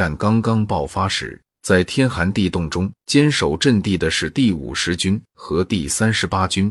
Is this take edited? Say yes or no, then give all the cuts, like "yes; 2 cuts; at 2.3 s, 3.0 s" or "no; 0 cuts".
yes; 2 cuts; at 1.5 s, 3.0 s